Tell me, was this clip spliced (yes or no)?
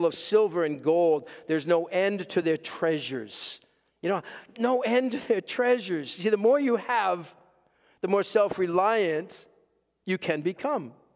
no